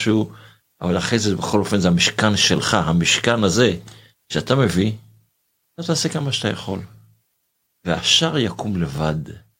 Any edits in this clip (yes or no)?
no